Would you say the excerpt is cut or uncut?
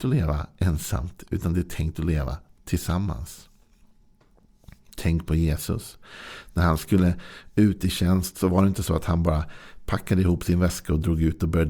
uncut